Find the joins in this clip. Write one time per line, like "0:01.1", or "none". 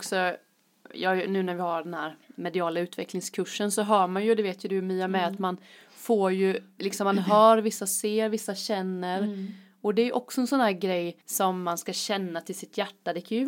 0:11.2